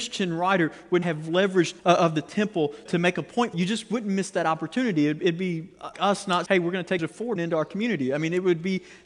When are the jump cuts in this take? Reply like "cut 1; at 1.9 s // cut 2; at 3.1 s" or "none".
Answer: cut 1; at 1.0 s // cut 2; at 1.8 s // cut 3; at 2.9 s // cut 4; at 3.5 s // cut 5; at 5.9 s // cut 6; at 6.5 s // cut 7; at 7.0 s // cut 8; at 7.4 s